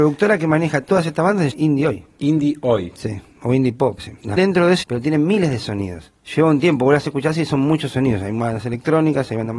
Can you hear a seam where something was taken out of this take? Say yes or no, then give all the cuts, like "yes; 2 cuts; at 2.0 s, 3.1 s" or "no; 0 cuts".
yes; 4 cuts; at 1.5 s, 4.0 s, 4.4 s, 4.8 s